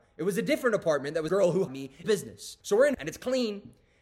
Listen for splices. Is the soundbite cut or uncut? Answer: cut